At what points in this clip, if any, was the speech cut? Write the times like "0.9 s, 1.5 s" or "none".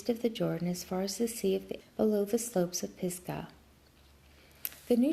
1.8 s